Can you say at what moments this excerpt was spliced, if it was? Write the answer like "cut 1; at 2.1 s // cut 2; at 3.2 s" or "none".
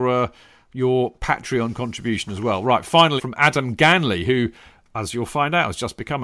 cut 1; at 3.2 s